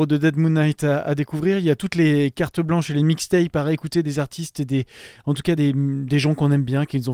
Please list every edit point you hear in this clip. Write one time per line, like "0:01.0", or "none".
none